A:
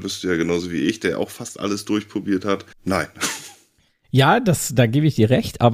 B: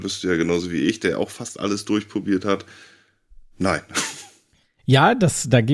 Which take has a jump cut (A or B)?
A